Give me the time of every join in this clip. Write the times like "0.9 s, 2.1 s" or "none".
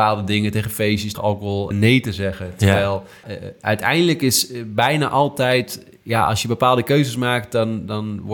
1.1 s, 1.7 s, 3.2 s